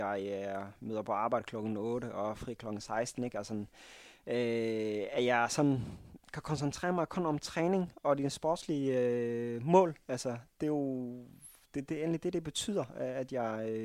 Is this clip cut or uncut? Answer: cut